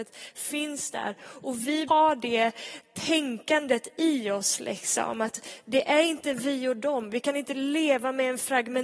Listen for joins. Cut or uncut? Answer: cut